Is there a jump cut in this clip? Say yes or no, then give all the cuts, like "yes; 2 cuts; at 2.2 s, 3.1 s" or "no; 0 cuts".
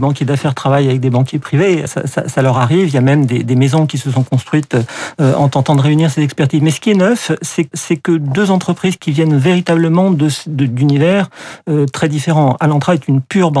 yes; 2 cuts; at 1.9 s, 7.7 s